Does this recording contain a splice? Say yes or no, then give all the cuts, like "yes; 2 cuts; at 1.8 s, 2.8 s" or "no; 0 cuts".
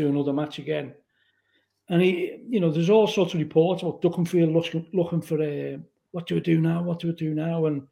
no; 0 cuts